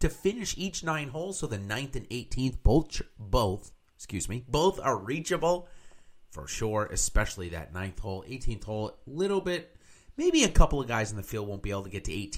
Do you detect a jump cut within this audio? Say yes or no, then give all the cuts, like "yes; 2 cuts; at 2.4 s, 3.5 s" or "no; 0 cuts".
no; 0 cuts